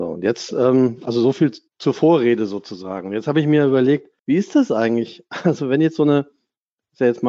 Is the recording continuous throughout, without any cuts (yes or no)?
no